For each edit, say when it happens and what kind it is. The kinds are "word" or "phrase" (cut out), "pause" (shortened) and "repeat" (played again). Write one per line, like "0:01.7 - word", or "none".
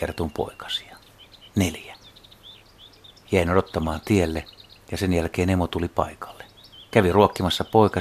none